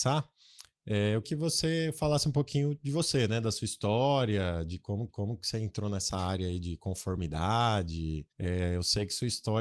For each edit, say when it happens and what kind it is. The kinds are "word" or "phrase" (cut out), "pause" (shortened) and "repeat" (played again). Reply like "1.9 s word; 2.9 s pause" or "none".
1.2 s word; 5.1 s repeat; 8.3 s pause